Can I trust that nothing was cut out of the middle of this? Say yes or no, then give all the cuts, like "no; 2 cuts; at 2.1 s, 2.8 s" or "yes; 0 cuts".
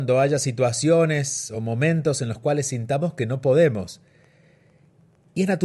yes; 0 cuts